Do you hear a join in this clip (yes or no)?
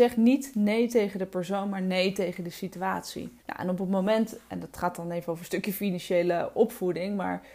yes